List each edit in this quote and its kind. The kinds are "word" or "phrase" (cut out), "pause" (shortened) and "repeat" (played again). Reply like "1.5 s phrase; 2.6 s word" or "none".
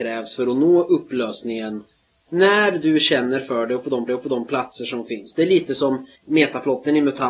4.1 s repeat; 6.2 s pause